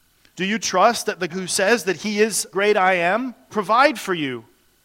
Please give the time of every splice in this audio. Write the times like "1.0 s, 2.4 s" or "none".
1.3 s, 2.5 s, 3.5 s